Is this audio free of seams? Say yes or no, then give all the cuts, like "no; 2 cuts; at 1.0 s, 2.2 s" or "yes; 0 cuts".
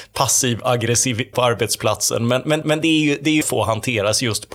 no; 3 cuts; at 1.3 s, 2.6 s, 3.4 s